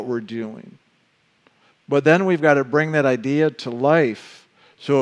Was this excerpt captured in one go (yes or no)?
yes